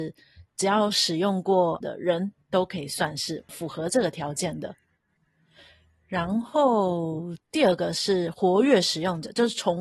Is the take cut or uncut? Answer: cut